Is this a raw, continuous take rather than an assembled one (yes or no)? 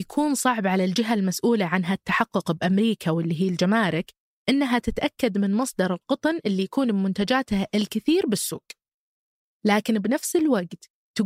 yes